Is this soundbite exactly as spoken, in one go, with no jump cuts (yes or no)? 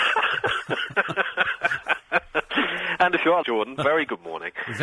no